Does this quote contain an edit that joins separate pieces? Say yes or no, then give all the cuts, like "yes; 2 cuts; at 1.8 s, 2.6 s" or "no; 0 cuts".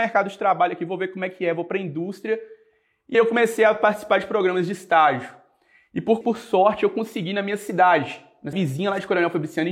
yes; 3 cuts; at 3.1 s, 6.2 s, 8.5 s